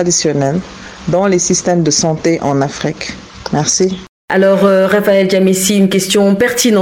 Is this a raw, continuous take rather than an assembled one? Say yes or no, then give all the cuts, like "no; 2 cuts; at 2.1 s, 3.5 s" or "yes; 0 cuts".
yes; 0 cuts